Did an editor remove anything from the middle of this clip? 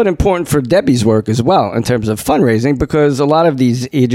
no; 0 cuts

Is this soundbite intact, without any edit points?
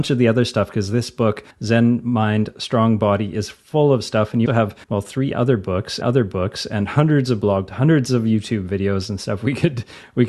no; 5 cuts; at 1.5 s, 4.5 s, 4.8 s, 6.0 s, 7.7 s

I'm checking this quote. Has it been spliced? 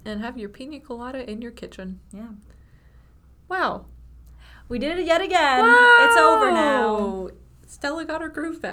yes; 1 cut; at 3.4 s

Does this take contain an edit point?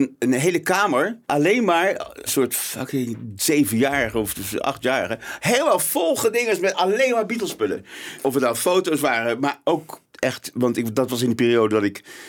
yes; 2 cuts; at 1.2 s, 2.3 s

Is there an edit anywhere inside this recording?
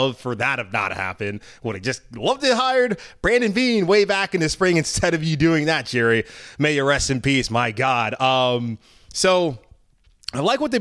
no; 0 cuts

